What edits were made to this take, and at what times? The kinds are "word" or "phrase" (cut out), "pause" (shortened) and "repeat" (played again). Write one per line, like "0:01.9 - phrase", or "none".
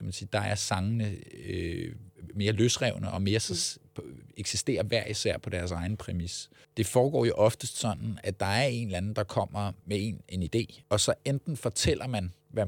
0:08.2 - word